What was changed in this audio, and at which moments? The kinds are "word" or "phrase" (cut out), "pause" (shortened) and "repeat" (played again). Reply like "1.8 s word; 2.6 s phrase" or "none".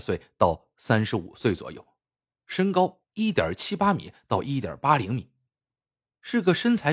none